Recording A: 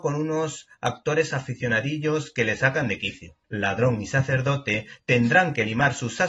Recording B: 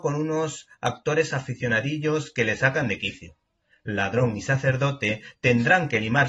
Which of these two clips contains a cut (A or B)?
A